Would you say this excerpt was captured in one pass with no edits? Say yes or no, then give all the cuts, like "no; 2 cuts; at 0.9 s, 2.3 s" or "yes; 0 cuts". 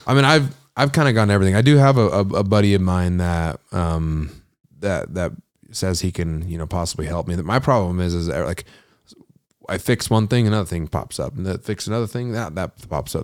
no; 1 cut; at 4.6 s